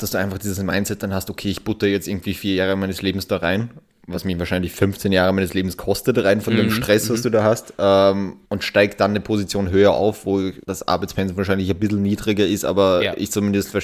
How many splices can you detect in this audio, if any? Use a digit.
2